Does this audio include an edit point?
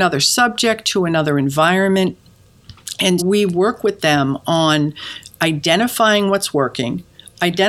yes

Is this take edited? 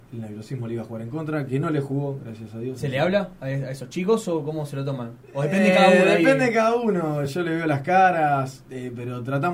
no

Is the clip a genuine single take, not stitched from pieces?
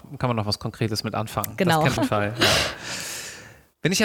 no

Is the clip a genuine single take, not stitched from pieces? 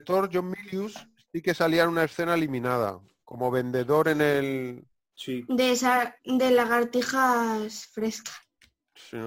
yes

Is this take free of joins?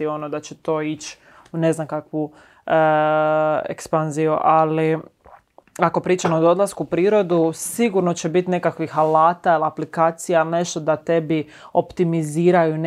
yes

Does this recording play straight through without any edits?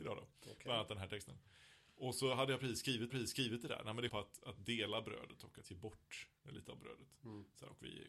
no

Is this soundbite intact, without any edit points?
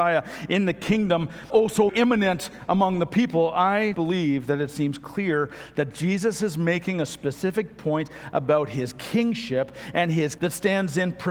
no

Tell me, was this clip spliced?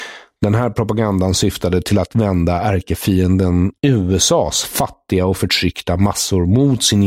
yes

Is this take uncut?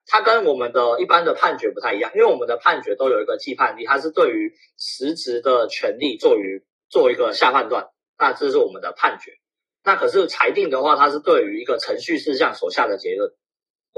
yes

